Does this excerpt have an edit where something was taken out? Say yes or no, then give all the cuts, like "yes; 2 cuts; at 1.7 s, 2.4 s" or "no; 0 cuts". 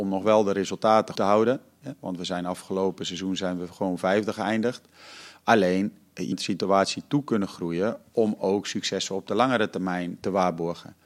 yes; 2 cuts; at 1.2 s, 6.3 s